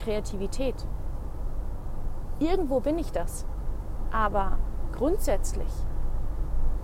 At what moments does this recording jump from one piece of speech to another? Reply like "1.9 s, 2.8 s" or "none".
none